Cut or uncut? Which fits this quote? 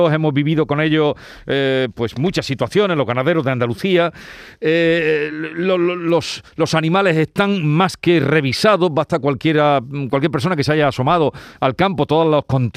uncut